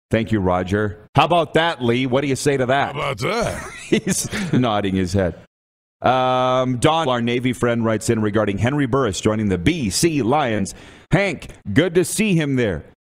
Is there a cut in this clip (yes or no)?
yes